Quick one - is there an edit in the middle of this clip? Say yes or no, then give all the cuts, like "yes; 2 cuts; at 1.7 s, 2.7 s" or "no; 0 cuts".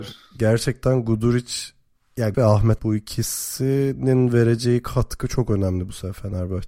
yes; 2 cuts; at 2.3 s, 2.8 s